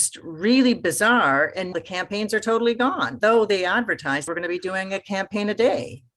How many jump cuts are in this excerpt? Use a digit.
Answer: 3